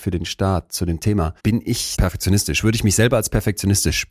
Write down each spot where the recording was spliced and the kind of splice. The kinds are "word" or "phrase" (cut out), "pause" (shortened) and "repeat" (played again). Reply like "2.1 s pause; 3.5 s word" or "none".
1.4 s pause; 1.9 s word